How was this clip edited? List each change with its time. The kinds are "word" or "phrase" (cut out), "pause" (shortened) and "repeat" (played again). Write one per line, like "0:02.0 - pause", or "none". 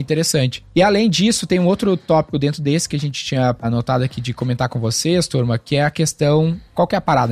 none